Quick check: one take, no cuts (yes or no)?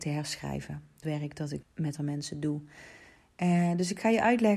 no